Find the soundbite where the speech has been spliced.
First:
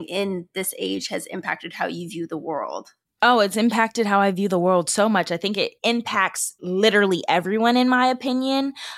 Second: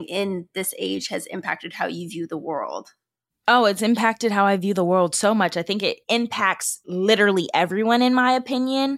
first; 1 cut; at 3.0 s

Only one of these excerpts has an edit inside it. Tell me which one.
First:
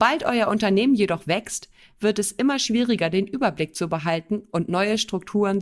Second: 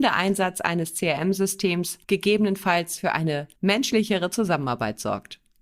second; 2 cuts; at 2.0 s, 3.6 s

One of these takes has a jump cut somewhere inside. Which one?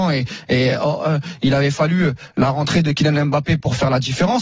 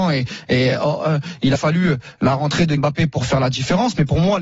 second; 2 cuts; at 1.6 s, 2.8 s

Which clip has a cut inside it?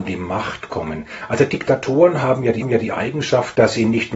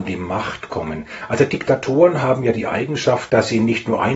first; 1 cut; at 2.6 s

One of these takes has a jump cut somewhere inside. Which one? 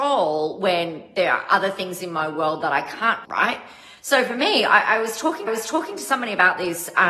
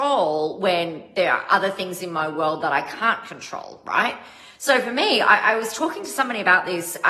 first; 2 cuts; at 3.2 s, 5.5 s

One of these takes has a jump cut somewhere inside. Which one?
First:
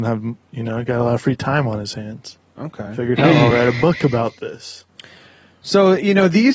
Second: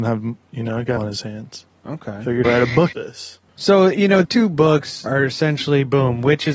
second; 6 cuts; at 1.0 s, 2.4 s, 2.9 s, 3.5 s, 4.2 s, 5.1 s

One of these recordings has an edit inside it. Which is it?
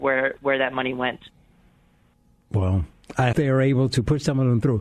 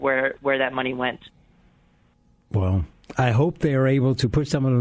first; 1 cut; at 3.3 s

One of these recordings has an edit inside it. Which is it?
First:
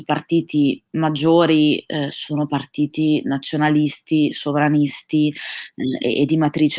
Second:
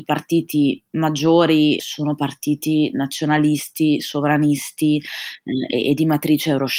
second; 1 cut; at 1.8 s

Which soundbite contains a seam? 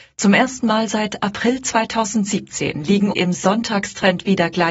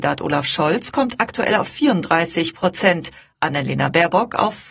first; 1 cut; at 3.1 s

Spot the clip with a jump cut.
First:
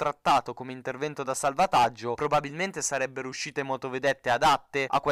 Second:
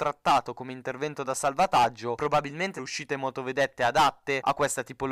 second; 1 cut; at 2.8 s

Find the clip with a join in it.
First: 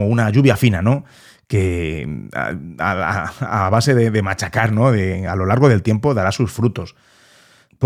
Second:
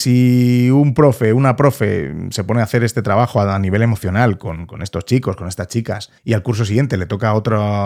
second; 1 cut; at 6.2 s

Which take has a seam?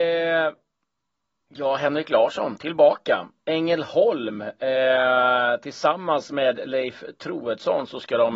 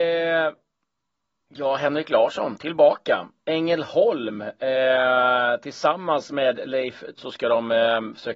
second; 1 cut; at 7.2 s

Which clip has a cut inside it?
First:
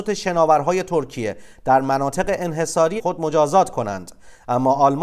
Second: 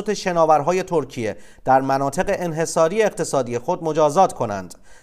first; 1 cut; at 3.0 s

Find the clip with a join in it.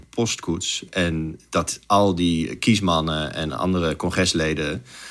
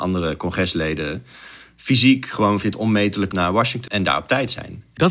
second; 3 cuts; at 2.6 s, 3.3 s, 3.9 s

